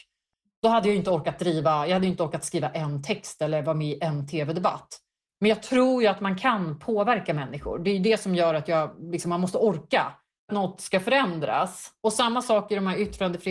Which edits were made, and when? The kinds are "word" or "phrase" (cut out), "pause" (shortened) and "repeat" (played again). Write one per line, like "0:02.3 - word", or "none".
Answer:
0:10.5 - phrase